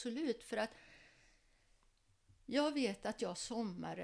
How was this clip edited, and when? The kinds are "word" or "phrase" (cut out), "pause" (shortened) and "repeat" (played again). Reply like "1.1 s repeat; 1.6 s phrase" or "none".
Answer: none

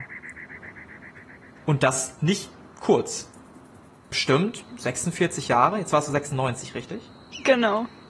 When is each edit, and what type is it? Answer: 2.7 s pause

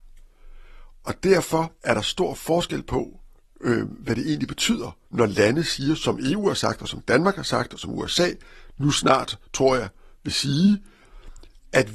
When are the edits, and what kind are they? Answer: 1.8 s pause; 5.1 s pause

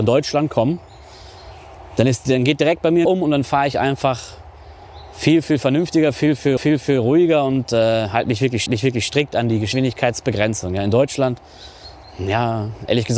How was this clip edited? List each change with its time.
3.0 s phrase; 6.6 s repeat; 8.7 s repeat

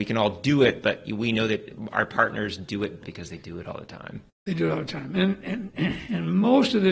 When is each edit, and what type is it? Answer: 3.0 s phrase

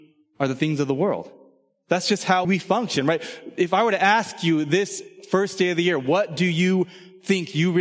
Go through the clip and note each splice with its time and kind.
2.4 s word

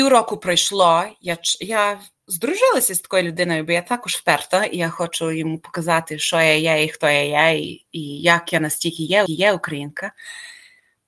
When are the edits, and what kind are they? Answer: 9.3 s repeat

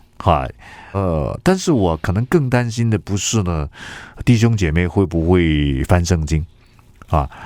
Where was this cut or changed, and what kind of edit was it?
0.9 s word

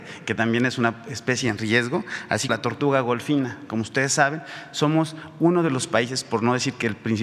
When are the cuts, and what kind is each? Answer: 2.5 s word

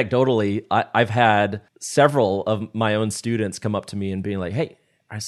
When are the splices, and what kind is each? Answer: 1.7 s pause

